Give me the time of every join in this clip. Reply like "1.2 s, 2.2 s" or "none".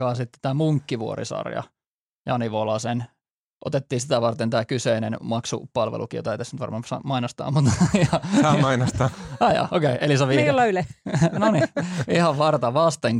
none